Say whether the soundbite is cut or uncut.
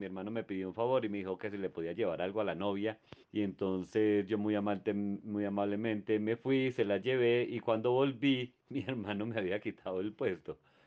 cut